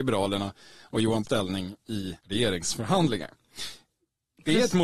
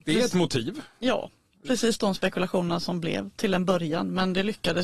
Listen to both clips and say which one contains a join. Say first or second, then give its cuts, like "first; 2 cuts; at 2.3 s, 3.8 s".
first; 2 cuts; at 1.2 s, 2.2 s